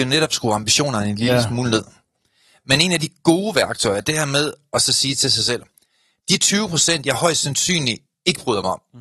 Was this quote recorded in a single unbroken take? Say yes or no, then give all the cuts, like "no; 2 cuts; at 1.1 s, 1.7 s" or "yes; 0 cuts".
no; 1 cut; at 4.1 s